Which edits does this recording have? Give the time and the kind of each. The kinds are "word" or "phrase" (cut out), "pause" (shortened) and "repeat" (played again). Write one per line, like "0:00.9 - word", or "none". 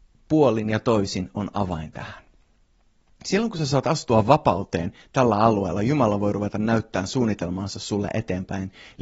none